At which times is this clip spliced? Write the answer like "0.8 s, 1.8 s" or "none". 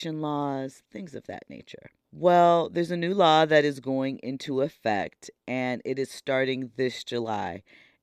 2.0 s

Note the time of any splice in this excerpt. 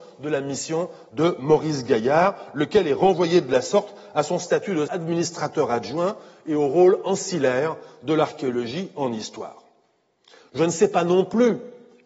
4.9 s

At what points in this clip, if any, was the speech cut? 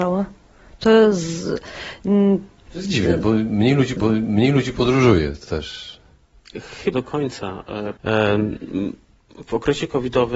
4.0 s, 5.5 s, 6.9 s, 8.0 s

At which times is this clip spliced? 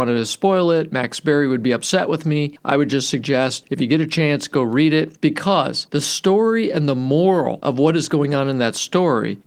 none

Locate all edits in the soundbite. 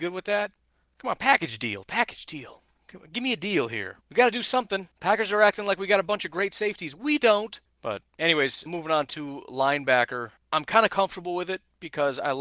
4.0 s, 4.9 s, 7.6 s, 8.7 s, 10.4 s

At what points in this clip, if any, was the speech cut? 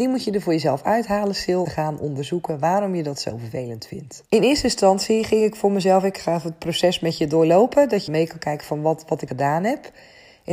1.7 s, 4.3 s, 8.1 s, 9.3 s

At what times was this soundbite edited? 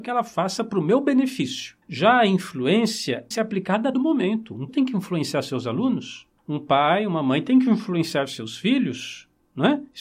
1.8 s, 3.3 s, 3.9 s, 4.7 s, 6.4 s

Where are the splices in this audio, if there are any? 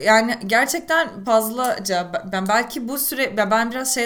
1.2 s

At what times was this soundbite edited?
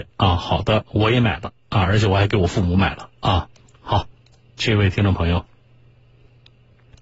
3.6 s

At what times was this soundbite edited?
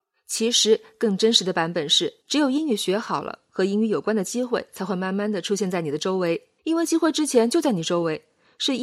2.2 s, 6.6 s

